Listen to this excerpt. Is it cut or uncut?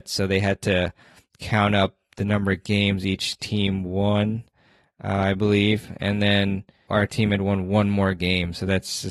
uncut